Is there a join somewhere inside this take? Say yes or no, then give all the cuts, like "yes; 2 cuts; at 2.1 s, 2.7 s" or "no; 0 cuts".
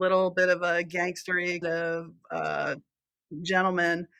yes; 1 cut; at 1.6 s